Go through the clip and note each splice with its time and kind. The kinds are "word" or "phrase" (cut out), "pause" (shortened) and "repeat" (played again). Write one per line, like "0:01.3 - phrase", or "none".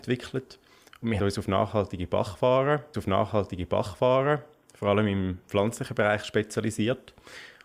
0:01.2 - word
0:02.9 - repeat